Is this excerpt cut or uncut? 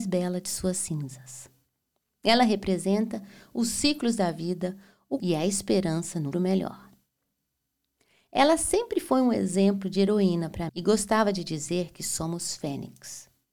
cut